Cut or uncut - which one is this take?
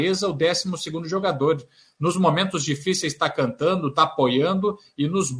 uncut